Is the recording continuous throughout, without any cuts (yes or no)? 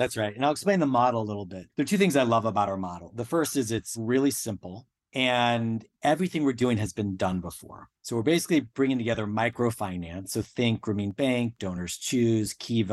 no